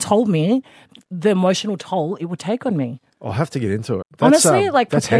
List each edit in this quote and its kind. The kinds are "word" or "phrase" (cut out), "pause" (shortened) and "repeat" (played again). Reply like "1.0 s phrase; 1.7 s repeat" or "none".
3.1 s pause; 4.0 s word